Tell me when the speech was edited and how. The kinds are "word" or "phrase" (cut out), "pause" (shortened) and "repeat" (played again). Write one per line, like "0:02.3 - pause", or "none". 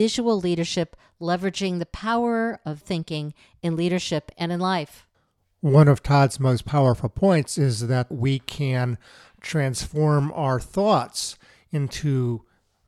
0:02.8 - word
0:08.1 - phrase